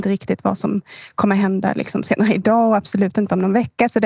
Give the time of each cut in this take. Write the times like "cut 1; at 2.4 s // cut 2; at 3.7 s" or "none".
none